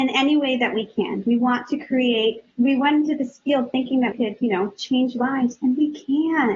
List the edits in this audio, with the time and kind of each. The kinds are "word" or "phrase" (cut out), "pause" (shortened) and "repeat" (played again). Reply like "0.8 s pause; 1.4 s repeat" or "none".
2.5 s pause; 4.1 s word